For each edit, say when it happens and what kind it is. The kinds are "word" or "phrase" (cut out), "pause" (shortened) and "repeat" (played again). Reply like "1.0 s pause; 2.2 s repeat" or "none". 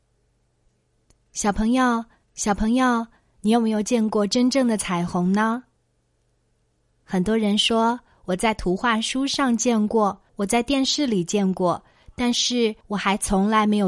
2.2 s repeat; 10.3 s pause; 12.8 s pause